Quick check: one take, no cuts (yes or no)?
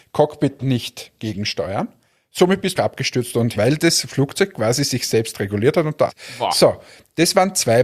no